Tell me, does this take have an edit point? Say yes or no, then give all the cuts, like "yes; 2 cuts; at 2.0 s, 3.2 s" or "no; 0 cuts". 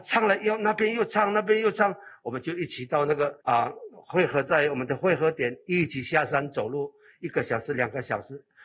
yes; 1 cut; at 3.4 s